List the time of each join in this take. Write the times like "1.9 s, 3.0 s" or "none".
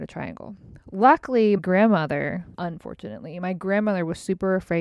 1.6 s, 2.5 s